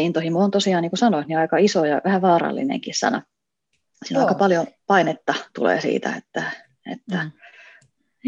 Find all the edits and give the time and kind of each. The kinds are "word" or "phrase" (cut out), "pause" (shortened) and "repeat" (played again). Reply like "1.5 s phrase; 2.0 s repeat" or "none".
none